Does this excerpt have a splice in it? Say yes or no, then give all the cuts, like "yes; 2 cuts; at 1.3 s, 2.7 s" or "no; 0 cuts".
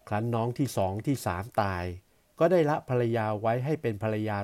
no; 0 cuts